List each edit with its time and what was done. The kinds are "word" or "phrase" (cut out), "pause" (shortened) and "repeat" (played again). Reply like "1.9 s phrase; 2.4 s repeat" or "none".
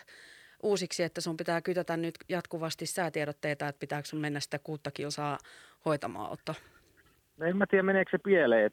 none